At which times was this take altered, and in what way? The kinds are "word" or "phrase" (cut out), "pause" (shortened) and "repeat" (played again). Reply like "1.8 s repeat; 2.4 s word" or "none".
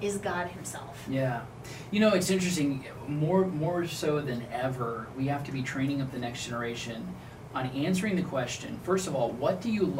none